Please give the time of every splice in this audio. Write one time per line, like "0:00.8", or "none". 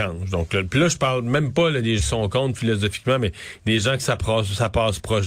0:02.0